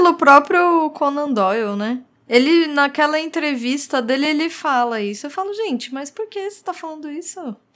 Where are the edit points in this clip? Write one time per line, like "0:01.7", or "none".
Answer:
none